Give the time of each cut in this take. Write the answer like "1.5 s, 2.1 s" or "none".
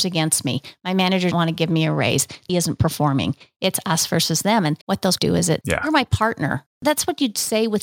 1.3 s, 2.5 s, 4.8 s, 5.2 s, 5.6 s